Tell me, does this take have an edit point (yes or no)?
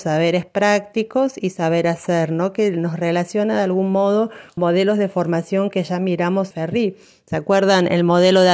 yes